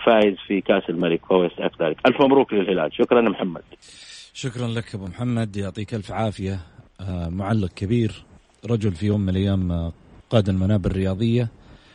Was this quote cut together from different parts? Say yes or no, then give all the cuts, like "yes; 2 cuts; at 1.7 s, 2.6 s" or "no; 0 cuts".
no; 0 cuts